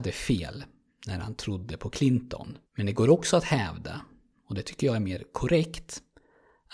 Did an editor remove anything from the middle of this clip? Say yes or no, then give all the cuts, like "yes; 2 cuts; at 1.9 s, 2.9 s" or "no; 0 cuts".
yes; 1 cut; at 2.7 s